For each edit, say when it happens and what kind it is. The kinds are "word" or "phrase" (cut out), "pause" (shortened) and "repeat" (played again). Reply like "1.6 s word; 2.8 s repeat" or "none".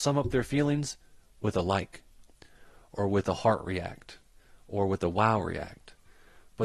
none